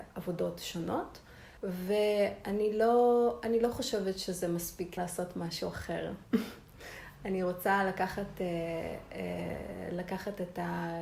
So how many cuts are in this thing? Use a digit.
2